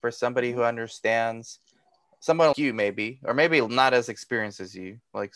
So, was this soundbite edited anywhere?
yes; 1 cut; at 2.5 s

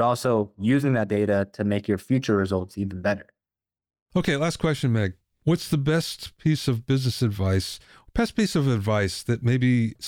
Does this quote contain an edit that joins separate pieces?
no; 0 cuts

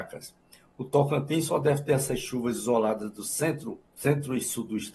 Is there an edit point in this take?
yes; 1 cut; at 3.9 s

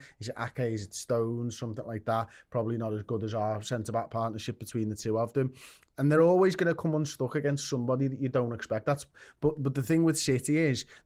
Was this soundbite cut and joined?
no; 0 cuts

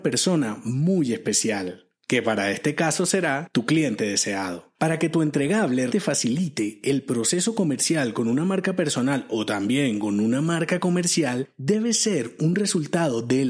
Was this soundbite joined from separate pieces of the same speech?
yes; 1 cut; at 5.9 s

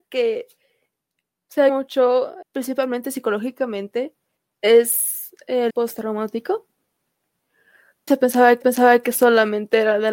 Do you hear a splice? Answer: yes; 6 cuts; at 1.7 s, 2.4 s, 4.4 s, 5.7 s, 8.1 s, 8.6 s

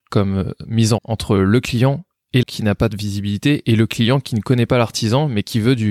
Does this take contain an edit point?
yes; 2 cuts; at 1.0 s, 2.4 s

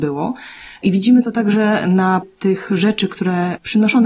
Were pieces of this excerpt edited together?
yes; 1 cut; at 2.2 s

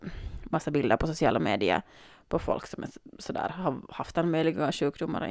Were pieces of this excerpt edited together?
no; 0 cuts

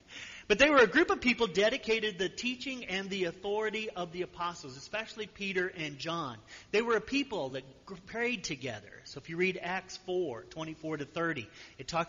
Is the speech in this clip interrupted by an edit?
no; 0 cuts

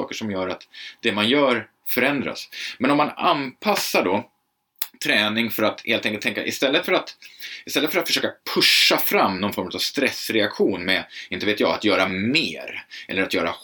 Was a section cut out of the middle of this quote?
no; 0 cuts

